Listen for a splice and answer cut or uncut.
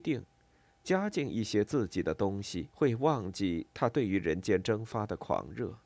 cut